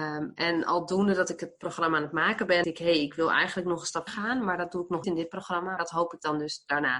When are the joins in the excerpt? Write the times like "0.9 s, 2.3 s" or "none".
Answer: 2.6 s, 4.1 s, 5.0 s, 5.8 s